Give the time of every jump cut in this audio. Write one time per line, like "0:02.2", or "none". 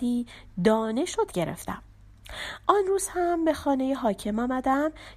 0:01.3